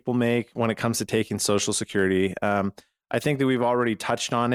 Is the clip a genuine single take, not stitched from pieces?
yes; 0 cuts

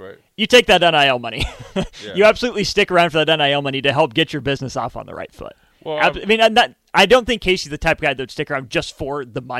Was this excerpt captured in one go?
yes; 0 cuts

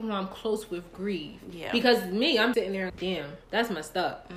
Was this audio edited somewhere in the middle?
yes; 3 cuts; at 2.5 s, 2.9 s, 3.4 s

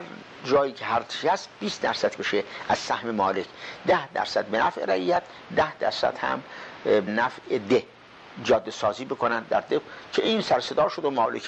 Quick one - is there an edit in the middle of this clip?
yes; 2 cuts; at 2.2 s, 7.1 s

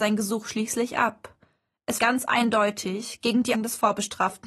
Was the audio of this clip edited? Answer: yes; 2 cuts; at 2.0 s, 3.5 s

